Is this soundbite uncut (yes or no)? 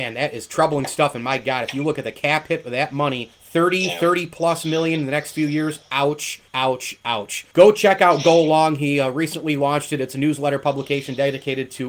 no